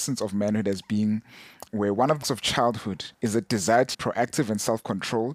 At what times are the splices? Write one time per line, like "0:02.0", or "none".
0:01.7
0:02.2
0:03.1
0:03.9